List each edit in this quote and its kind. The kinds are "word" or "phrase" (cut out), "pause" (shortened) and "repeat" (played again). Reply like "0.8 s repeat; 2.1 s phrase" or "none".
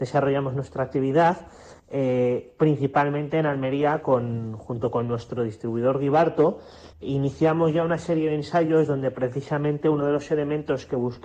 1.8 s pause; 6.9 s pause